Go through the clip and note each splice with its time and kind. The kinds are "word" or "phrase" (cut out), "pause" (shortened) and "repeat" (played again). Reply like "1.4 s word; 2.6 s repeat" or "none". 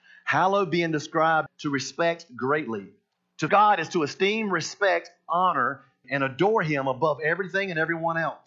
1.5 s word; 3.5 s word; 6.0 s word